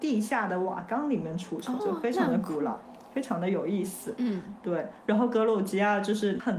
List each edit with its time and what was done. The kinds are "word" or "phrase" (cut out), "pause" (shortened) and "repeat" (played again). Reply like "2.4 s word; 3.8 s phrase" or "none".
1.8 s word

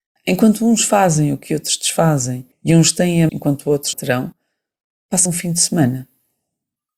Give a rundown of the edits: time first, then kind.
2.5 s pause; 3.3 s word; 3.9 s word; 5.3 s word

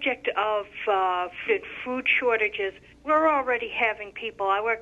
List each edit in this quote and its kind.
1.5 s word; 2.9 s pause

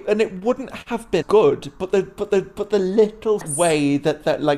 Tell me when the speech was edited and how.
1.2 s word; 2.3 s repeat; 3.4 s phrase

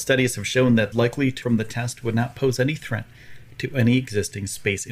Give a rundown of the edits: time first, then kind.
0.9 s phrase; 1.4 s word

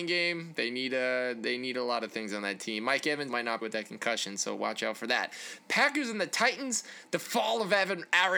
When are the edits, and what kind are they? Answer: 3.3 s word; 3.6 s word

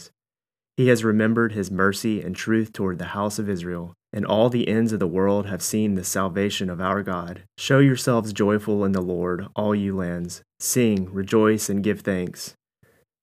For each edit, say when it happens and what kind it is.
4.0 s pause; 7.5 s pause; 10.5 s pause

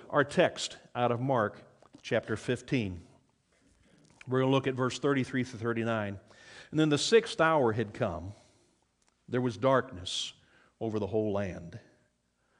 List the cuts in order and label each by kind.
none

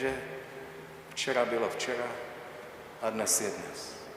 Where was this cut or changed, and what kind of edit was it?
none

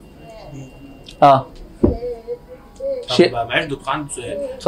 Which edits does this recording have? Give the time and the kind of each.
none

